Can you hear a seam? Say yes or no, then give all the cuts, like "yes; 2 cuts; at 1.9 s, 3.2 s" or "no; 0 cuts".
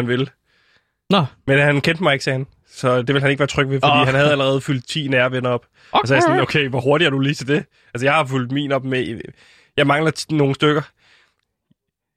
no; 0 cuts